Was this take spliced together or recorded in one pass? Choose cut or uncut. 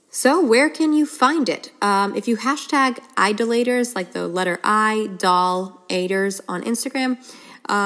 uncut